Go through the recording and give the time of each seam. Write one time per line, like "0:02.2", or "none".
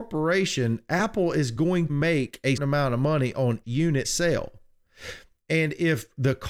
0:01.9
0:02.6
0:03.6
0:04.0